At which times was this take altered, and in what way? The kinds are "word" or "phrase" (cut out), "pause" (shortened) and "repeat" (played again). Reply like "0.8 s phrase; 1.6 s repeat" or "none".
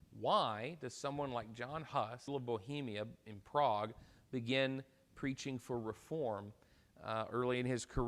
2.3 s phrase